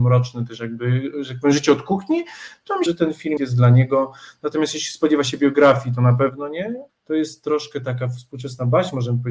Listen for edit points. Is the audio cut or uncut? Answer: cut